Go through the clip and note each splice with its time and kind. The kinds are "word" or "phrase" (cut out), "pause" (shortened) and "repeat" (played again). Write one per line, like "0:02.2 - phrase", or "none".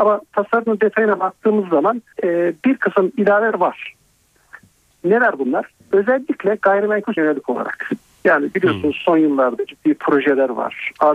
0:02.1 - pause
0:03.5 - word
0:07.2 - word